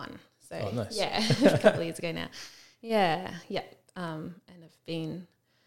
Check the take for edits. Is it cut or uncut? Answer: uncut